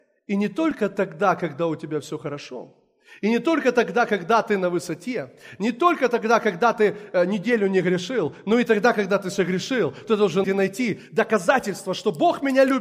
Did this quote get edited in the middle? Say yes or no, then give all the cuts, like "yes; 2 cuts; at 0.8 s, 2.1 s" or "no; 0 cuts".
yes; 1 cut; at 10.4 s